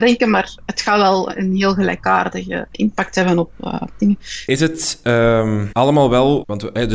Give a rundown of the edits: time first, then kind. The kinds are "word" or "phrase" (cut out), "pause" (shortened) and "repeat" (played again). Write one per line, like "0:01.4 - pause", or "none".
0:02.7 - word